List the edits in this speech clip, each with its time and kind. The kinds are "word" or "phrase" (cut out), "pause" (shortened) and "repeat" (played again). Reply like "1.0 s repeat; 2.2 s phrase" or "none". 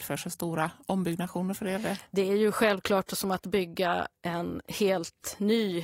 4.2 s pause